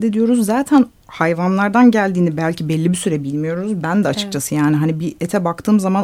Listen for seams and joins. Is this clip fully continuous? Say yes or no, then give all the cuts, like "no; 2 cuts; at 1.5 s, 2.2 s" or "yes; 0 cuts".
yes; 0 cuts